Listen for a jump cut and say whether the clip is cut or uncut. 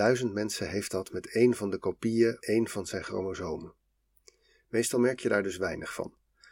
cut